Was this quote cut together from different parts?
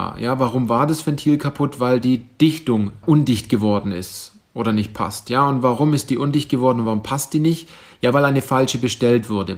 no; 0 cuts

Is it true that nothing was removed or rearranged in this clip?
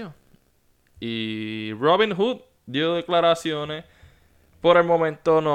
yes; 0 cuts

